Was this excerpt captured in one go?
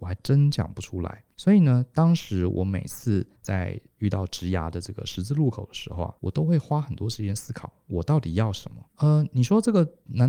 no; 4 cuts; at 1.3 s, 3.3 s, 6.2 s, 8.9 s

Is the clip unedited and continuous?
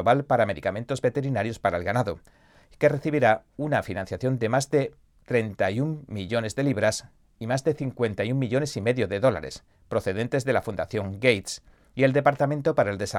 yes; 0 cuts

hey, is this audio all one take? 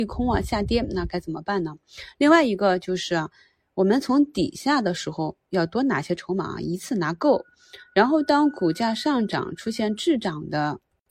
yes; 0 cuts

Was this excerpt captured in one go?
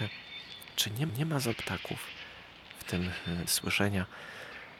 no; 3 cuts; at 1.1 s, 1.5 s, 3.5 s

